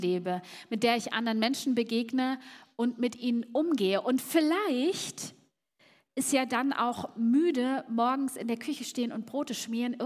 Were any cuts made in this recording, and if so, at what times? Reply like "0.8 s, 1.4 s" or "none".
none